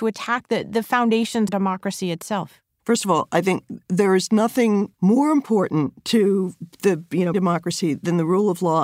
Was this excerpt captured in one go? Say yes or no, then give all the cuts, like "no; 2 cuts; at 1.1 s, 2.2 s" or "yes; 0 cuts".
no; 3 cuts; at 1.5 s, 4.9 s, 7.3 s